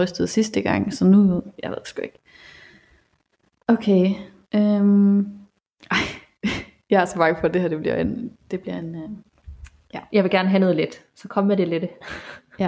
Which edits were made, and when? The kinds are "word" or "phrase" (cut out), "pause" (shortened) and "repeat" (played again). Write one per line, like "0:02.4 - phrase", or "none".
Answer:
none